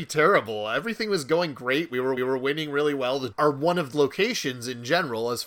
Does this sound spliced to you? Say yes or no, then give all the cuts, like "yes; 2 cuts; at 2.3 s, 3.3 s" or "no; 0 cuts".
yes; 3 cuts; at 2.2 s, 3.3 s, 3.9 s